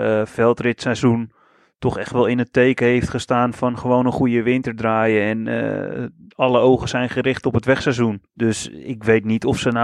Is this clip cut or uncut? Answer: uncut